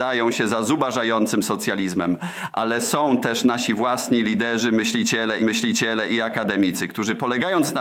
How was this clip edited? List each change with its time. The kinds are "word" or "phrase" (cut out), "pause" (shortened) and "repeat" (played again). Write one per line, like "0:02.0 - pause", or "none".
0:05.4 - repeat